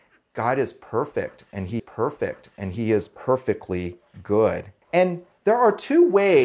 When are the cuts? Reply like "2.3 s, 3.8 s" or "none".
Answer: 1.8 s, 4.8 s